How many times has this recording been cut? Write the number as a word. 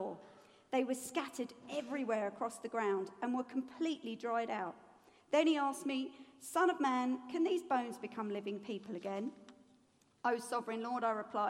zero